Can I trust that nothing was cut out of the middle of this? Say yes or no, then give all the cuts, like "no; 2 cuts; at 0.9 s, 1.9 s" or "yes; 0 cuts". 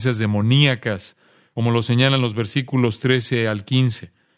yes; 0 cuts